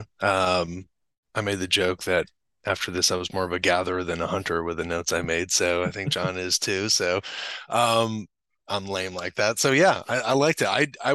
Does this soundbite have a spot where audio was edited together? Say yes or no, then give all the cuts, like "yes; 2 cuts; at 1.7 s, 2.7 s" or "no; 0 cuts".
no; 0 cuts